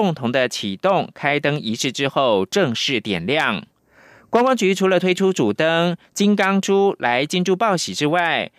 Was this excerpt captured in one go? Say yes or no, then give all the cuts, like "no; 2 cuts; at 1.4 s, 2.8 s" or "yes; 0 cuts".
yes; 0 cuts